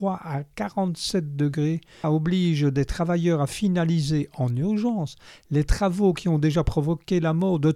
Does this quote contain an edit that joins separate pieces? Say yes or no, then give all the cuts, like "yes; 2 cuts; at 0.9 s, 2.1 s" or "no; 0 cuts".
yes; 1 cut; at 2.0 s